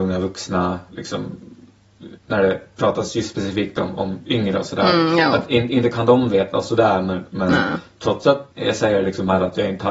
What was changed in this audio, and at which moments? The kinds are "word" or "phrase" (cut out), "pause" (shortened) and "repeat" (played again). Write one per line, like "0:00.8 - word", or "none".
0:02.2 - pause
0:08.5 - pause